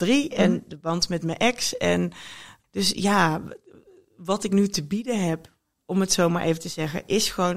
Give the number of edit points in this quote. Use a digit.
0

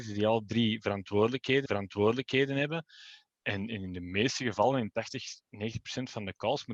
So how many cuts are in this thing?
1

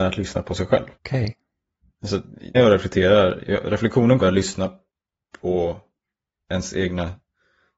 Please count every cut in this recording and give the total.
3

